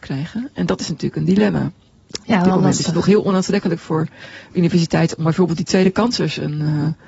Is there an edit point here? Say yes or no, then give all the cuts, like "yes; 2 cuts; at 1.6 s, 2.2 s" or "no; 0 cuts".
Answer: no; 0 cuts